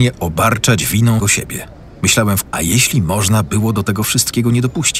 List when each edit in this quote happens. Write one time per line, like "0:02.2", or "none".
0:01.2
0:02.4